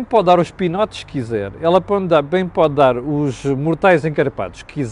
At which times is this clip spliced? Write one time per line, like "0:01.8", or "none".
none

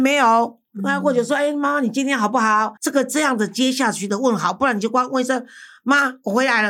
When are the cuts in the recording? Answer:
0:02.8

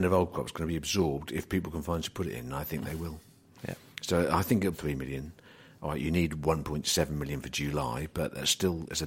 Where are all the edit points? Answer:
0:02.0
0:04.7

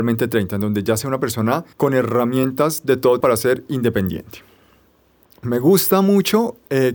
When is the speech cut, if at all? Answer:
0:01.7
0:03.2

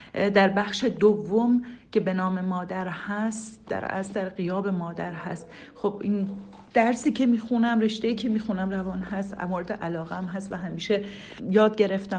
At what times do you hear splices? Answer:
none

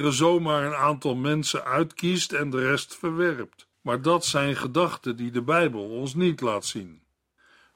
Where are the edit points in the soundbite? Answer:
0:03.7

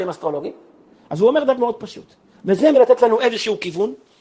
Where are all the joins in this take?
0:01.6
0:02.7

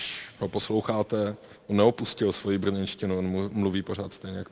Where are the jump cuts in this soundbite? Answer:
0:01.6

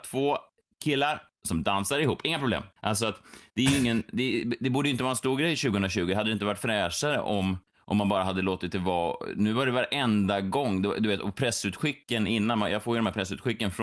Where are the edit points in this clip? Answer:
0:02.8
0:07.7

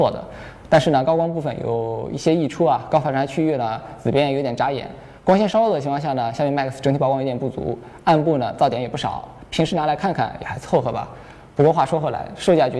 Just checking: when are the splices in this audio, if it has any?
0:05.2

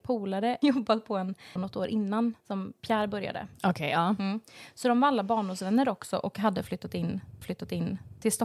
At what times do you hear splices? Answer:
0:01.6
0:02.4
0:07.4

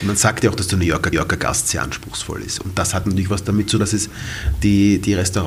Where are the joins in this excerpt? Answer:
0:01.1
0:03.8

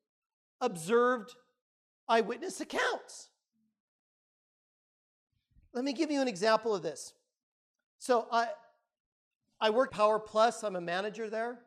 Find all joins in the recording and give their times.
0:09.9

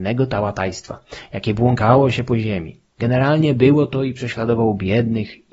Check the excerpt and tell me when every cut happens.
none

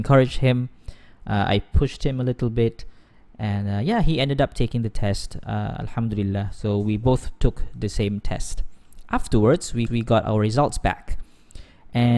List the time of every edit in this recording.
0:09.9

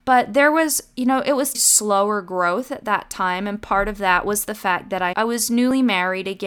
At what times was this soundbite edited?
0:01.5
0:05.1

